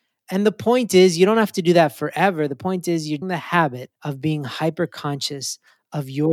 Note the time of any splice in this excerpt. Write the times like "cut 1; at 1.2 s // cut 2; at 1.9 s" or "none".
cut 1; at 3.2 s // cut 2; at 4.0 s